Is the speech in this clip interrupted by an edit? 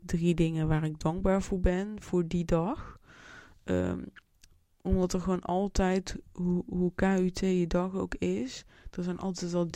no; 0 cuts

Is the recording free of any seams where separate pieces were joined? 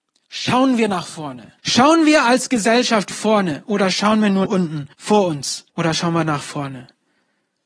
no; 5 cuts; at 1.6 s, 3.1 s, 4.5 s, 4.9 s, 5.7 s

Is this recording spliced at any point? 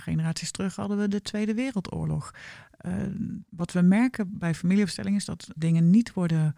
yes; 2 cuts; at 3.5 s, 5.6 s

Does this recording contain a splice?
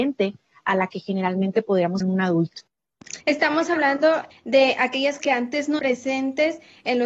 yes; 5 cuts; at 2.0 s, 3.2 s, 4.3 s, 5.2 s, 5.8 s

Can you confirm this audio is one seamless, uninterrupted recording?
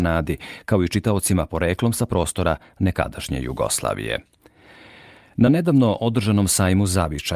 yes; 0 cuts

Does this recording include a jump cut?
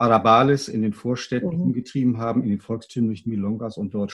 no; 0 cuts

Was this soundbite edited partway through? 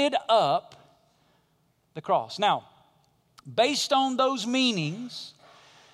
no; 0 cuts

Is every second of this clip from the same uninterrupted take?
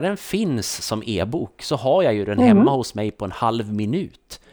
yes; 0 cuts

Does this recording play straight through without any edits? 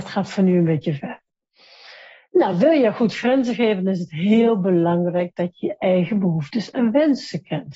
yes; 0 cuts

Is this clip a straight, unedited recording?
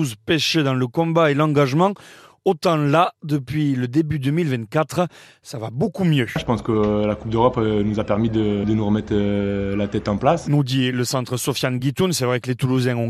yes; 0 cuts

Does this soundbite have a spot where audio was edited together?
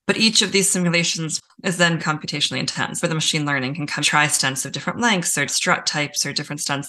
yes; 4 cuts; at 2.0 s, 3.0 s, 4.0 s, 5.5 s

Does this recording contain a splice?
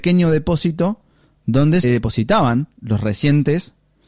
yes; 2 cuts; at 1.8 s, 2.7 s

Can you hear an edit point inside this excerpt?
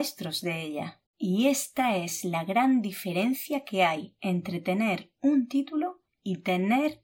yes; 1 cut; at 1.1 s

